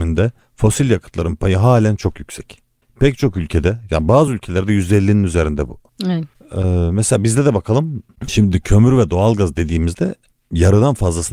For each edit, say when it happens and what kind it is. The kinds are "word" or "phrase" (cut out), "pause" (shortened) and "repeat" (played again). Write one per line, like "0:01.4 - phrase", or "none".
none